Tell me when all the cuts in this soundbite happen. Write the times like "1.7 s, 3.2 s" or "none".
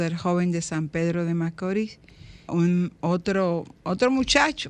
2.5 s